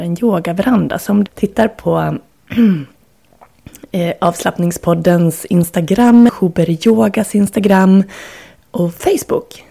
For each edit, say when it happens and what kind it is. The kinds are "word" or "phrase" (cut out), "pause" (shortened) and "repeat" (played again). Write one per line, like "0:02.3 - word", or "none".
0:01.3 - word
0:06.3 - phrase